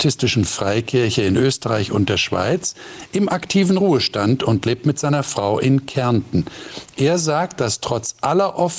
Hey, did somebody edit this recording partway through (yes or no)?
no